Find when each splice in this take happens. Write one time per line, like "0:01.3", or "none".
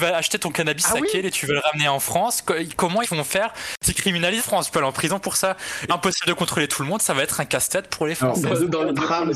0:03.0
0:04.4
0:05.9